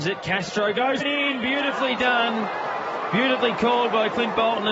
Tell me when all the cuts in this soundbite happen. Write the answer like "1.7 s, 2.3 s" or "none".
1.0 s